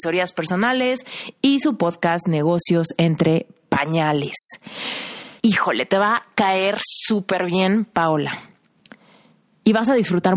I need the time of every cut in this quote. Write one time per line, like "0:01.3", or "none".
0:05.4